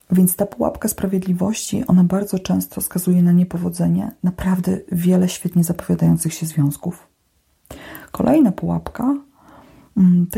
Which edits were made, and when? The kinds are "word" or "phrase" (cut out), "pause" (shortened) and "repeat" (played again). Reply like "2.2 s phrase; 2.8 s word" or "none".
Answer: none